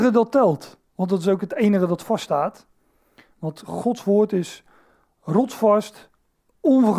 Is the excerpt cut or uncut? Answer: uncut